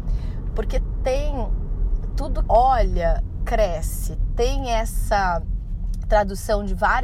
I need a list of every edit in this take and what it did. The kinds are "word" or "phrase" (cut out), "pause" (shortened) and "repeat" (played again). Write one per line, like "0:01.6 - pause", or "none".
0:02.4 - phrase